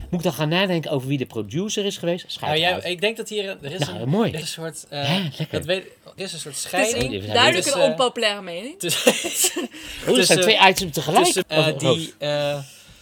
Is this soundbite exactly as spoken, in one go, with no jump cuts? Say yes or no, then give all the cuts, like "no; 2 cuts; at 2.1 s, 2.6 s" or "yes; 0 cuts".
no; 3 cuts; at 4.4 s, 6.2 s, 11.4 s